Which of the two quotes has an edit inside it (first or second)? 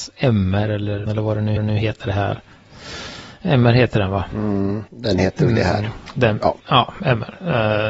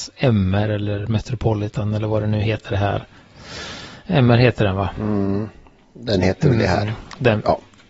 first